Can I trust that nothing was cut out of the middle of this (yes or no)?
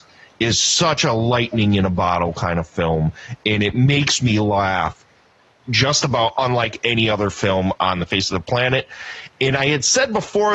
yes